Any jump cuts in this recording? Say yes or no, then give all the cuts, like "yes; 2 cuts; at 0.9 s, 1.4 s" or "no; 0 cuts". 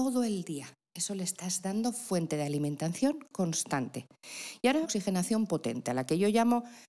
yes; 1 cut; at 4.8 s